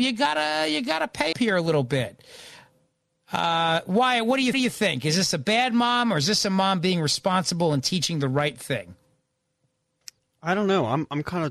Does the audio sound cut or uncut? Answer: cut